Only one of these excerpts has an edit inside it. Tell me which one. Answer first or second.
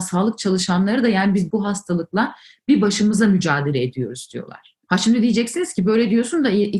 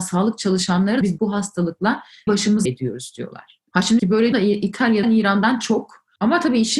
second